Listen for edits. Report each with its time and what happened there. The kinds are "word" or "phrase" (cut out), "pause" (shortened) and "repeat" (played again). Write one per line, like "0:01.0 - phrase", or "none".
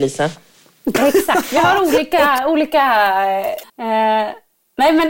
0:03.7 - pause